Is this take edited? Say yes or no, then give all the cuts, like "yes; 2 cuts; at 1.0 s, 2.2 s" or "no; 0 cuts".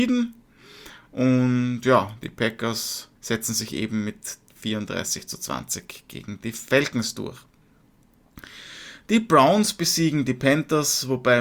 yes; 1 cut; at 3.2 s